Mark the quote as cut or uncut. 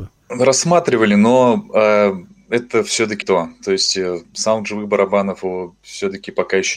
cut